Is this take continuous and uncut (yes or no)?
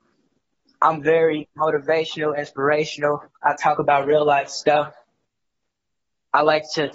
yes